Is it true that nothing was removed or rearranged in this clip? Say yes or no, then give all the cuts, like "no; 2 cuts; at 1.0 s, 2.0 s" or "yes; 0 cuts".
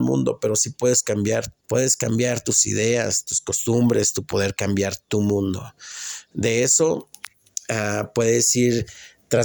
no; 2 cuts; at 1.6 s, 4.3 s